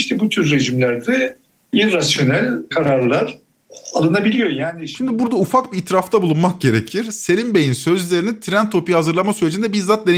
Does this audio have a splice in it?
no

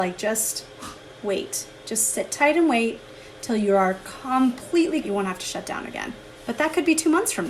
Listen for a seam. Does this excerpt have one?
yes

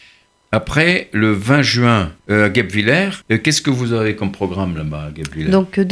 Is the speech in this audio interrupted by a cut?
yes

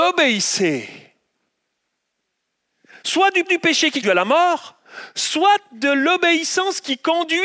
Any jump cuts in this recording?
yes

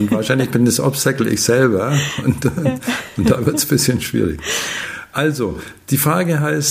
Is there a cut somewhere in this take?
no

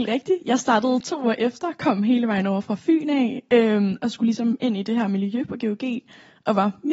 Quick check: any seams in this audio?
no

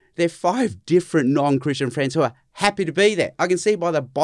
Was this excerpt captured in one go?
yes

